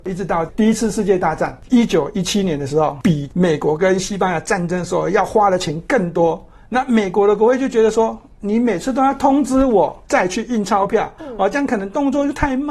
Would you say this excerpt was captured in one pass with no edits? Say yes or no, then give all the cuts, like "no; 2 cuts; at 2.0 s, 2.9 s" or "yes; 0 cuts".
yes; 0 cuts